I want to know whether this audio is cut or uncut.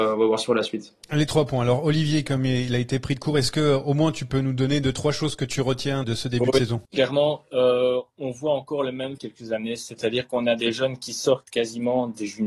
cut